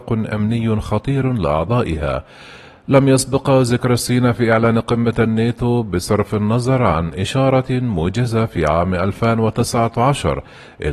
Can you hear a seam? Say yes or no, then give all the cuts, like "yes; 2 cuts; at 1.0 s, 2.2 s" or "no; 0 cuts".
no; 0 cuts